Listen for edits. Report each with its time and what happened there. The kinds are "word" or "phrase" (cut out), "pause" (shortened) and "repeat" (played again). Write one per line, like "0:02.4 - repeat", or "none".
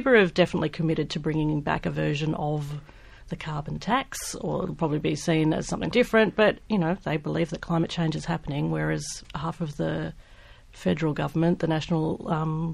0:05.9 - word